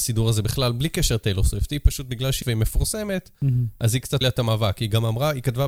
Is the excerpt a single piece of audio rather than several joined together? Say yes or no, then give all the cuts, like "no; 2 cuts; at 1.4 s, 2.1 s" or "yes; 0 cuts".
no; 2 cuts; at 2.4 s, 4.2 s